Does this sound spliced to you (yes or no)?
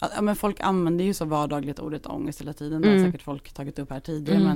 no